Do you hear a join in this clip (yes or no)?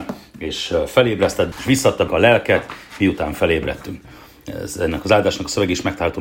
yes